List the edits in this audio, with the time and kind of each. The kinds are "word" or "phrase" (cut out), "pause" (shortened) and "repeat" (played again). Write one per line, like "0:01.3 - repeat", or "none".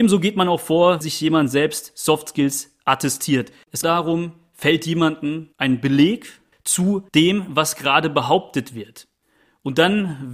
0:01.0 - word
0:03.8 - phrase
0:05.5 - pause
0:06.5 - phrase
0:07.1 - pause